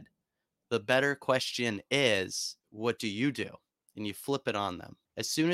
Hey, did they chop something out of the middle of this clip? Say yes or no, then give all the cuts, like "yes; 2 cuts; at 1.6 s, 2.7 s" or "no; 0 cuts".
no; 0 cuts